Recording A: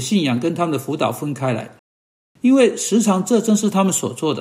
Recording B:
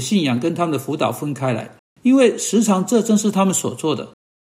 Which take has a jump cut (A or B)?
B